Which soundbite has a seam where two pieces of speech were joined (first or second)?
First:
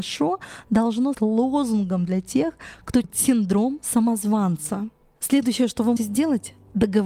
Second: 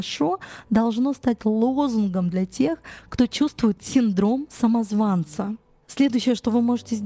first